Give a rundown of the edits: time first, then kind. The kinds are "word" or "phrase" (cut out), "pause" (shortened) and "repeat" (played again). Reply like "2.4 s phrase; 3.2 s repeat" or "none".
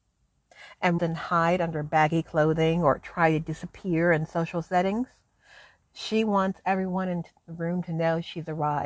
1.0 s word

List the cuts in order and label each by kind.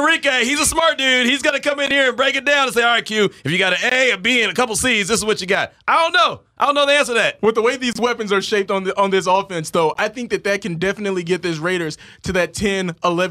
none

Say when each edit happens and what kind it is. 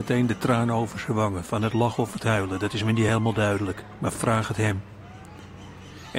none

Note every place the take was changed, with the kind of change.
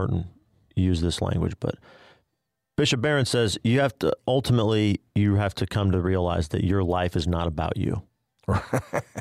none

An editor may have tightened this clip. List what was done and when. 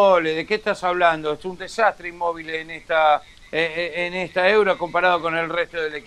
none

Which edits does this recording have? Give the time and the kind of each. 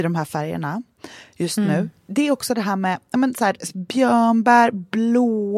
none

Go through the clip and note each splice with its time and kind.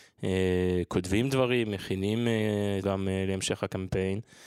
2.8 s word

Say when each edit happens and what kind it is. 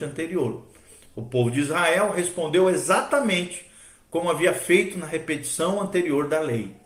none

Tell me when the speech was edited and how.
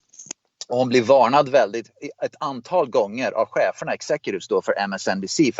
none

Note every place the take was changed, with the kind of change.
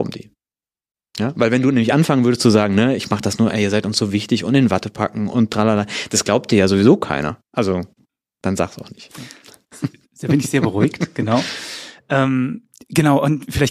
none

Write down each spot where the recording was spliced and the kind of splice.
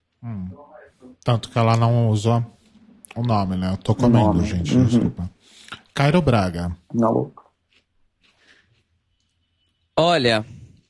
none

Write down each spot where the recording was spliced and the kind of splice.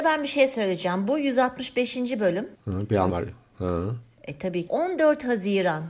2.5 s pause; 3.1 s word; 4.7 s word

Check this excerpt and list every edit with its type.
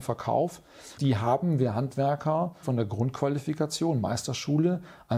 1.0 s word; 2.6 s word

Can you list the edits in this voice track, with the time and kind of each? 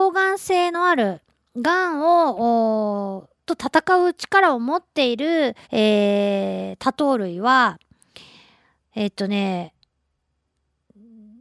5.6 s pause

